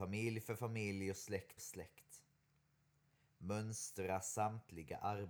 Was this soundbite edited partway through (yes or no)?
yes